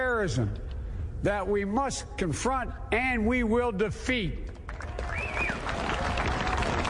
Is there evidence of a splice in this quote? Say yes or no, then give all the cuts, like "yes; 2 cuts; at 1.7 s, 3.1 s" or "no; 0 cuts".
no; 0 cuts